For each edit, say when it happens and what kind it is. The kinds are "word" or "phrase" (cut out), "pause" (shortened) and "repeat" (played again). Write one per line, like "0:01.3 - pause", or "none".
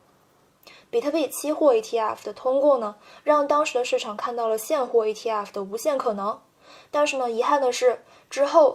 none